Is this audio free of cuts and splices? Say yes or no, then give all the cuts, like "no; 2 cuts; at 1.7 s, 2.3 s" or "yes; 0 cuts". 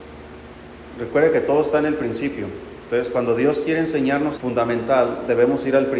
no; 1 cut; at 4.4 s